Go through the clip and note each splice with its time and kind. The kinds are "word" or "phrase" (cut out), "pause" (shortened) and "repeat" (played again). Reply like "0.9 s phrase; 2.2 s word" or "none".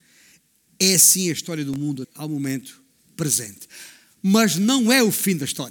2.0 s word